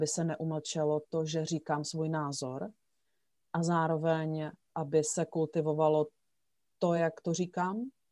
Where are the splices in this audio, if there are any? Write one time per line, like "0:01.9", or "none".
none